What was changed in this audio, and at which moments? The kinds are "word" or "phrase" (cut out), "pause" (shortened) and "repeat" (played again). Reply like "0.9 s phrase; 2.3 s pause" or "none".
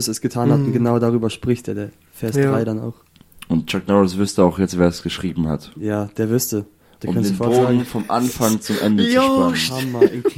none